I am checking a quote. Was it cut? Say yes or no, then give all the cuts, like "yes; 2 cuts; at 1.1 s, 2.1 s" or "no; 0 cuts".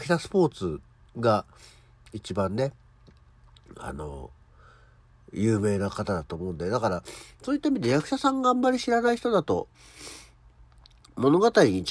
no; 0 cuts